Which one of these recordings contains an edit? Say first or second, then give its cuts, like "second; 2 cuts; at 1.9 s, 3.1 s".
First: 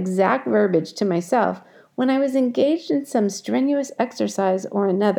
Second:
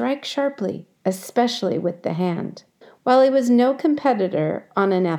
second; 2 cuts; at 0.9 s, 2.8 s